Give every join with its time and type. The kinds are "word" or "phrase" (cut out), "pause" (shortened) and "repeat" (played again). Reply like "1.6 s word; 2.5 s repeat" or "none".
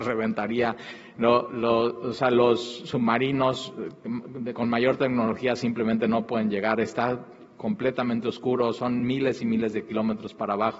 none